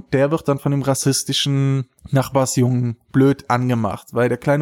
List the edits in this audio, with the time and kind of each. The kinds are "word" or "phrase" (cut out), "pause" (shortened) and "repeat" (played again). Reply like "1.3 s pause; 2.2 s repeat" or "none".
2.0 s pause